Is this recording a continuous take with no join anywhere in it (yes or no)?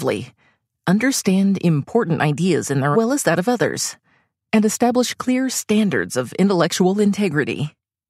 no